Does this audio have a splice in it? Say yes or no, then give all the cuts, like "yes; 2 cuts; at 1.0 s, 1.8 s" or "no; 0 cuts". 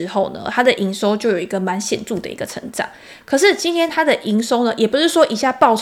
no; 0 cuts